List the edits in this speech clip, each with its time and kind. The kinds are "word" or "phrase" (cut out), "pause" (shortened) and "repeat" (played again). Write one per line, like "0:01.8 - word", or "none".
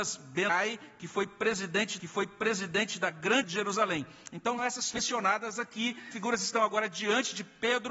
0:02.0 - repeat
0:03.4 - phrase
0:04.6 - word
0:06.1 - word